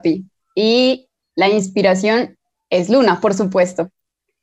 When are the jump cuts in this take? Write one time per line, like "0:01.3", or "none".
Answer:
none